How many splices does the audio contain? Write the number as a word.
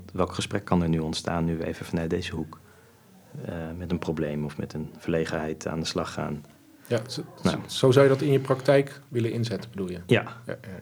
zero